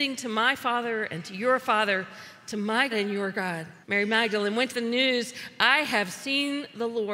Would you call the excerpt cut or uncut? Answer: cut